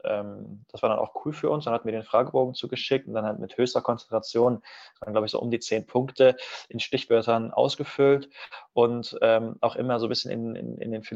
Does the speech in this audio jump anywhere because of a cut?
no; 0 cuts

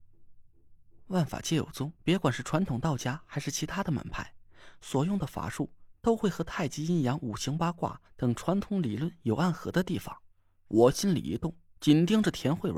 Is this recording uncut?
no; 3 cuts; at 2.0 s, 8.1 s, 10.3 s

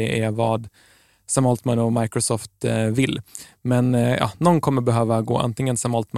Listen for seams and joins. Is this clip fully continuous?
yes; 0 cuts

